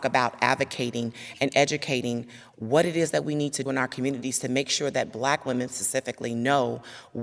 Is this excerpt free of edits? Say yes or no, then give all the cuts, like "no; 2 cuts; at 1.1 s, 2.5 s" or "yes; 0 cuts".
no; 1 cut; at 3.7 s